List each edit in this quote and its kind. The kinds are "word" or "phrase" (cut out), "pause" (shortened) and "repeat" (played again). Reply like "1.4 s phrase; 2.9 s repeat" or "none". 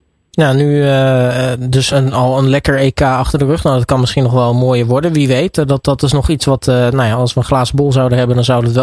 1.9 s word